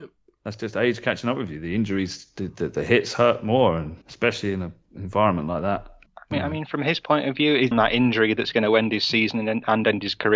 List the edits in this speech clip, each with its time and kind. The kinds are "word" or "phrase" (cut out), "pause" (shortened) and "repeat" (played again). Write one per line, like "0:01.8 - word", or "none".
0:04.0 - pause
0:06.1 - pause
0:07.7 - phrase